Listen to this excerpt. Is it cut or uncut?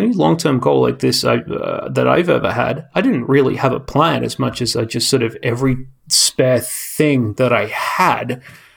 uncut